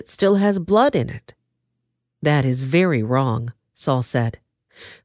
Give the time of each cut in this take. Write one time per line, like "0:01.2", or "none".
none